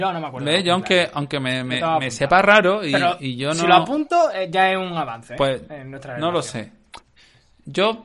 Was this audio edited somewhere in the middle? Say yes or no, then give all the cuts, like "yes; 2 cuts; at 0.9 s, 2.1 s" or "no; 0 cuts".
no; 0 cuts